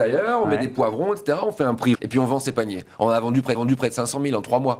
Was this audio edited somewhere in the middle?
yes; 2 cuts; at 1.9 s, 3.5 s

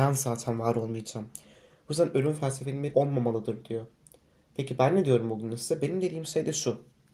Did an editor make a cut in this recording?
yes; 1 cut; at 2.9 s

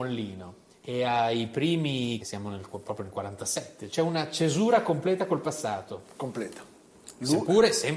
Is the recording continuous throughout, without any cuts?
no; 2 cuts; at 2.2 s, 3.9 s

